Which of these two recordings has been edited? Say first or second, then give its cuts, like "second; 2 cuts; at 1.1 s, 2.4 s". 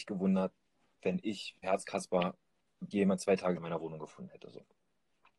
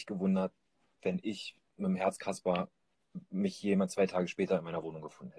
first; 3 cuts; at 1.6 s, 2.9 s, 3.6 s